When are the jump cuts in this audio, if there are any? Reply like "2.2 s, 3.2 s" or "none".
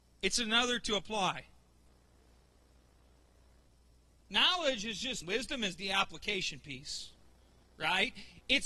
5.2 s